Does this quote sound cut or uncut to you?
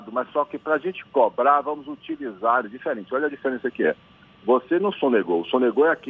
uncut